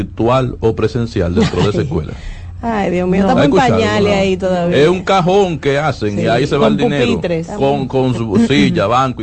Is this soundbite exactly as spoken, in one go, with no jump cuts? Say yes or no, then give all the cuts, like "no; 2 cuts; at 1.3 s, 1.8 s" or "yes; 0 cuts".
yes; 0 cuts